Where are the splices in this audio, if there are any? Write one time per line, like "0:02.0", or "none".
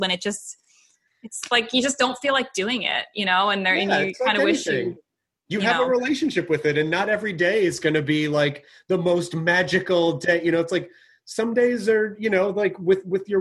none